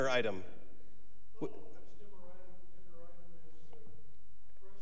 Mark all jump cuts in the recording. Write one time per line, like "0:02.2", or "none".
none